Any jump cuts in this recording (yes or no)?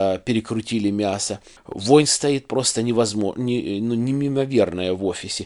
no